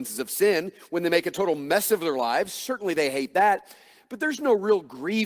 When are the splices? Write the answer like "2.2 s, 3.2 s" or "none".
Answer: none